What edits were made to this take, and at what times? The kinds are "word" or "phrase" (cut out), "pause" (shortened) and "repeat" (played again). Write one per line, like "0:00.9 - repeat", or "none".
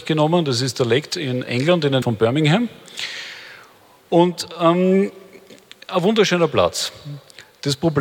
0:01.1 - word
0:01.5 - word
0:02.0 - word

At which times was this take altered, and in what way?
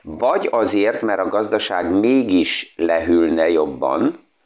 none

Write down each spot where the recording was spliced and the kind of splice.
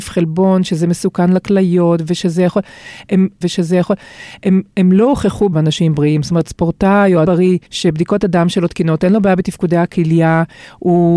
0:03.4 - repeat
0:05.5 - word
0:07.2 - word
0:07.7 - pause

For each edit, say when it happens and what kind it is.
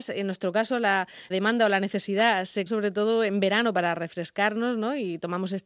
0:01.3 - word
0:02.7 - word

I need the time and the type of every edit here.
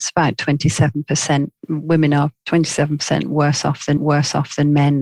0:01.6 - pause
0:04.0 - repeat

